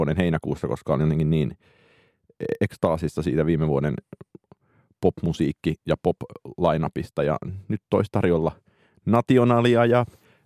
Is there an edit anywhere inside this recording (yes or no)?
no